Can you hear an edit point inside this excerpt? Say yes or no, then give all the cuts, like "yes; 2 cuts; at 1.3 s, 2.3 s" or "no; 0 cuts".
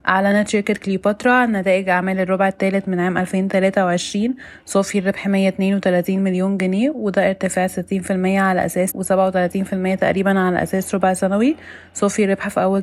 yes; 1 cut; at 8.9 s